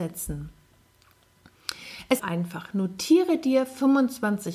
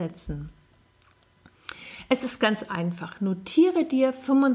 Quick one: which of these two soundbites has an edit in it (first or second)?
first